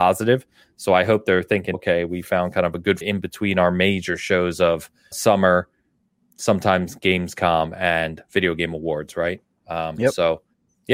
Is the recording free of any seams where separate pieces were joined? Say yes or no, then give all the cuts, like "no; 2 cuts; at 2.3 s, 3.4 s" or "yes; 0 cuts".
no; 4 cuts; at 1.7 s, 2.2 s, 3.0 s, 5.1 s